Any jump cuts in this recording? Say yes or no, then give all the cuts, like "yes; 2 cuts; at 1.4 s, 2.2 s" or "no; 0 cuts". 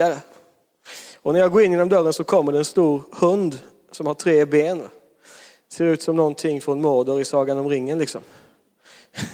no; 0 cuts